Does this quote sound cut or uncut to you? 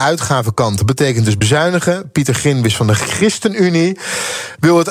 uncut